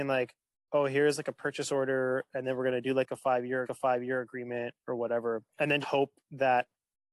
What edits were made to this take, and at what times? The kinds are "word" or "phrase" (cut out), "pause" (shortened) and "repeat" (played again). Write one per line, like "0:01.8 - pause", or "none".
0:03.6 - repeat
0:05.5 - pause
0:05.8 - word